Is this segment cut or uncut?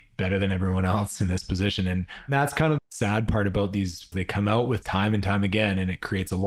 cut